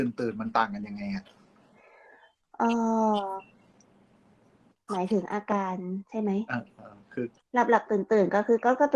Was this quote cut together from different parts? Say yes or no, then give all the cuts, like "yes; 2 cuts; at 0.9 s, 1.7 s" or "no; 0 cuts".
no; 0 cuts